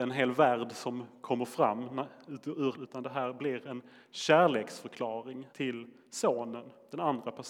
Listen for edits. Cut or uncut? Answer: cut